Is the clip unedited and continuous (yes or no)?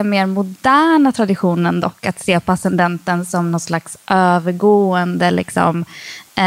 yes